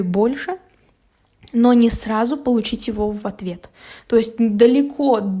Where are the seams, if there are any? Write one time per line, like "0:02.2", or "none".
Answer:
none